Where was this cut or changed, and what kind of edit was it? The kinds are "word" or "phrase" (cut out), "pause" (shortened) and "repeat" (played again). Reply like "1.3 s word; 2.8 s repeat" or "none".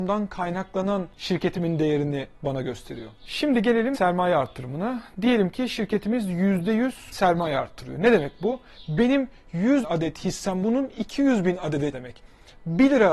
3.9 s word; 7.1 s word; 9.8 s word; 10.6 s word; 11.9 s word